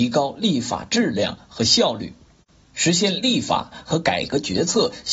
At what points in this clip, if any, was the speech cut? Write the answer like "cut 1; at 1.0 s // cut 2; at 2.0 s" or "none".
none